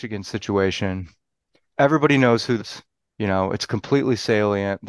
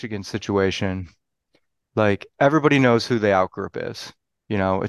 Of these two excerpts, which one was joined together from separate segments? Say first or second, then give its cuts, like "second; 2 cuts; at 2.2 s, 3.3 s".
first; 2 cuts; at 1.7 s, 2.6 s